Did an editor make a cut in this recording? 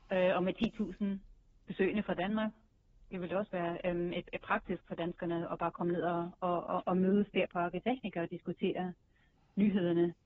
no; 0 cuts

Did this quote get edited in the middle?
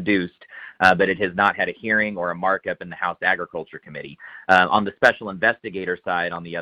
no; 0 cuts

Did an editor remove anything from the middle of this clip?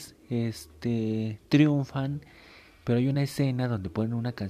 no; 0 cuts

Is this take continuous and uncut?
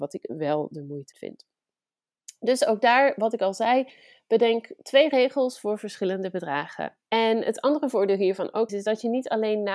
no; 3 cuts; at 1.1 s, 7.0 s, 8.7 s

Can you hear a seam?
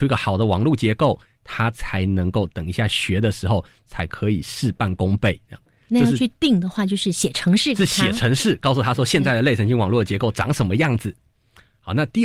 no; 0 cuts

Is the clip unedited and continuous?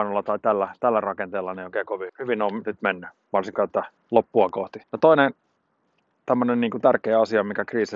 no; 3 cuts; at 2.1 s, 4.0 s, 4.8 s

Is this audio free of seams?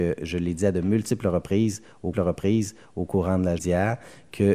no; 2 cuts; at 2.1 s, 3.6 s

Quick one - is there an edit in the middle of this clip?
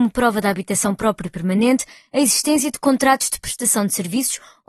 no; 0 cuts

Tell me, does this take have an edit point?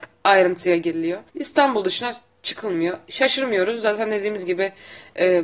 yes; 1 cut; at 1.3 s

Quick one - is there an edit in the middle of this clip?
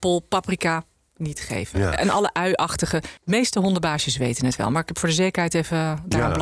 yes; 1 cut; at 3.2 s

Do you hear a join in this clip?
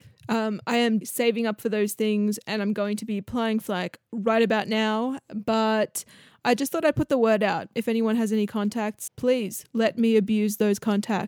yes; 3 cuts; at 1.0 s, 3.7 s, 9.1 s

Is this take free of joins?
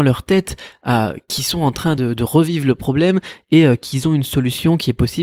yes; 0 cuts

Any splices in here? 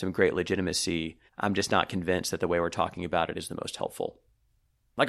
yes; 1 cut; at 1.3 s

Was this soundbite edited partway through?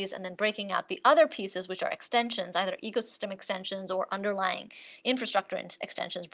no; 0 cuts

